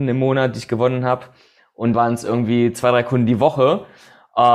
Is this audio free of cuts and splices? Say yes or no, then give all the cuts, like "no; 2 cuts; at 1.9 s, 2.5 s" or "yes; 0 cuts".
no; 1 cut; at 1.9 s